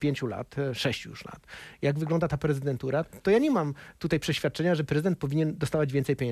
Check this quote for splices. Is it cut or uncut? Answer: uncut